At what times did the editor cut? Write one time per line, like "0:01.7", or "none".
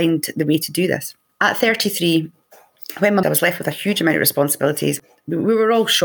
0:01.3
0:03.2